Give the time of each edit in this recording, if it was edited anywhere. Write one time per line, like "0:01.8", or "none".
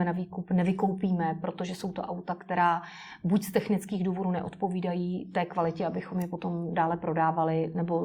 none